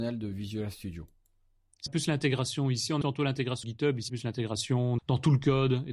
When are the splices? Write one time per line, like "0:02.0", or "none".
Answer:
0:01.9
0:03.0
0:03.6
0:04.1
0:05.0